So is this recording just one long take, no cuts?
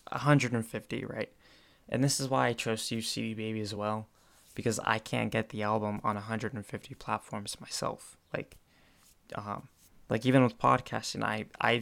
yes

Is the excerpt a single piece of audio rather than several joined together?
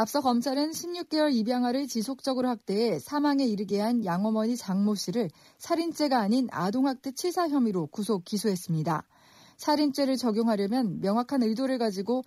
yes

